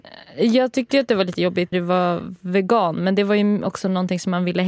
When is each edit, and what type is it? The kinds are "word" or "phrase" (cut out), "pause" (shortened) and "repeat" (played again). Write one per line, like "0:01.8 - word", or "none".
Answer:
0:01.7 - word